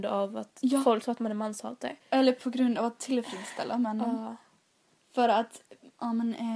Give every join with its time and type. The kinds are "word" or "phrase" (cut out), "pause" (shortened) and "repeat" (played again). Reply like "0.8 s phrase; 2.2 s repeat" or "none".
2.0 s pause